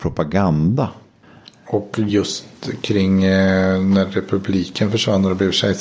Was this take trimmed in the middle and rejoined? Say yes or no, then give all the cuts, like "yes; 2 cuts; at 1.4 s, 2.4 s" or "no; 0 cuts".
no; 0 cuts